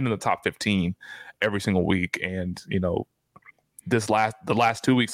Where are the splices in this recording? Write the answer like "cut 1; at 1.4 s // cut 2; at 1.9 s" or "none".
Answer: none